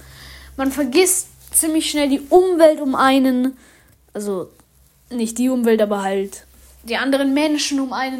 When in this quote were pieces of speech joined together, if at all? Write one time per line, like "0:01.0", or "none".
none